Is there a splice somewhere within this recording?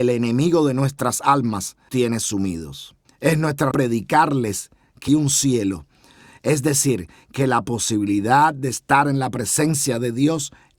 yes; 4 cuts; at 1.9 s, 3.0 s, 3.7 s, 5.1 s

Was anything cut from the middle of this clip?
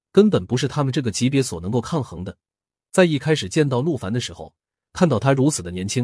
no; 0 cuts

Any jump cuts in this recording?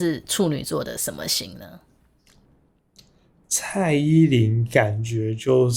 no; 0 cuts

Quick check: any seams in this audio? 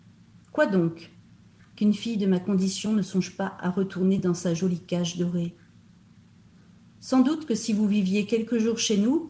no; 0 cuts

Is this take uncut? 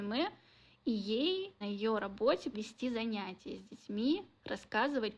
no; 2 cuts; at 1.6 s, 2.5 s

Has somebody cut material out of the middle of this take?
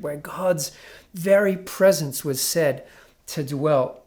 no; 0 cuts

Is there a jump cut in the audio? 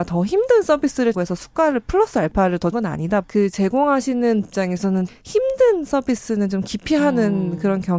yes; 5 cuts; at 1.1 s, 2.7 s, 3.2 s, 4.4 s, 5.1 s

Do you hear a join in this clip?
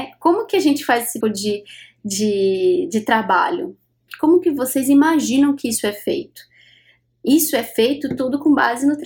yes; 1 cut; at 1.2 s

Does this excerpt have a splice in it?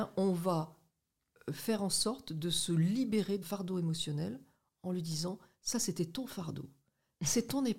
yes; 1 cut; at 3.4 s

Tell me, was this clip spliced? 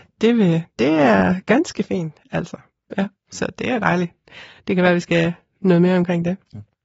no; 0 cuts

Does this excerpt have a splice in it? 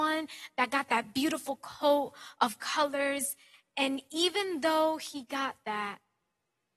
no; 0 cuts

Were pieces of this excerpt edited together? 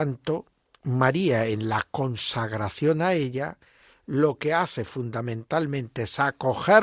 no; 0 cuts

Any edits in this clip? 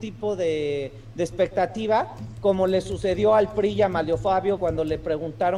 yes; 1 cut; at 4.6 s

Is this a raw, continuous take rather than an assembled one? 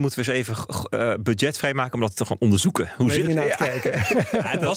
no; 1 cut; at 3.3 s

